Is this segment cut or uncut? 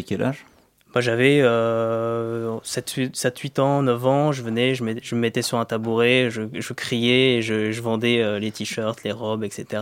uncut